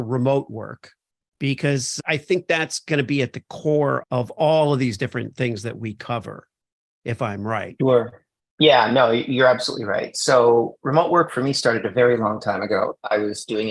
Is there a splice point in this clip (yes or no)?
no